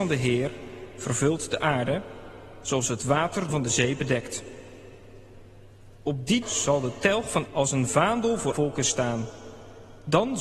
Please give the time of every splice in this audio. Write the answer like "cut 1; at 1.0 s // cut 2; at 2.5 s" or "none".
cut 1; at 3.5 s // cut 2; at 6.4 s // cut 3; at 7.5 s // cut 4; at 8.5 s